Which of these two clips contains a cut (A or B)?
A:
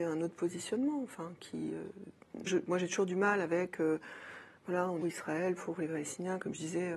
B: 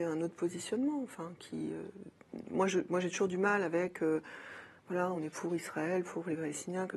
A